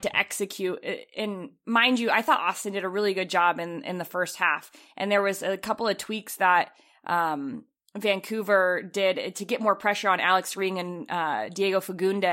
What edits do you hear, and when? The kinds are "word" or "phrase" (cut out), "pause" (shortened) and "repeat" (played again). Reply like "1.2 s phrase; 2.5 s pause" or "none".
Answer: none